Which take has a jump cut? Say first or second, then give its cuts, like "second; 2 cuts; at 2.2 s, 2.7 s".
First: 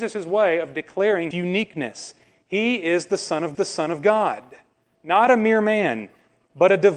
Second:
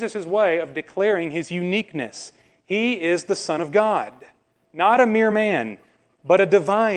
first; 2 cuts; at 1.3 s, 3.5 s